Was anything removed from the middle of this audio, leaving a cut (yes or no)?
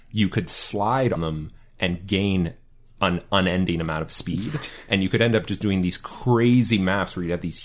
yes